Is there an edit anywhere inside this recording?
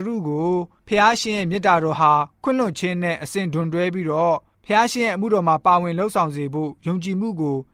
yes; 1 cut; at 2.3 s

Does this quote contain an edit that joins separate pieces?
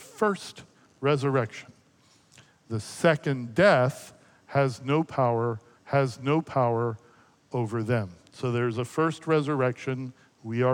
yes; 1 cut; at 5.7 s

